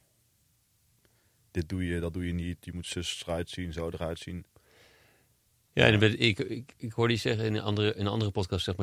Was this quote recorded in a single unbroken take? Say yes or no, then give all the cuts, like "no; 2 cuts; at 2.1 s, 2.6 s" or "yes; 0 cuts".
yes; 0 cuts